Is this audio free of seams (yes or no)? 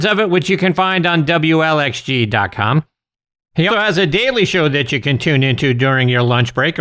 no